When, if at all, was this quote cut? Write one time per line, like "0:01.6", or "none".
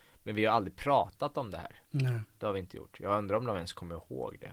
0:01.8